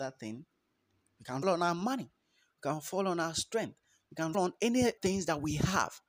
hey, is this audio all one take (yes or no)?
no